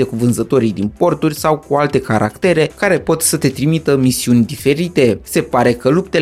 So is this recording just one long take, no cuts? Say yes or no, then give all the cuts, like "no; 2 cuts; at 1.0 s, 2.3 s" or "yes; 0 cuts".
yes; 0 cuts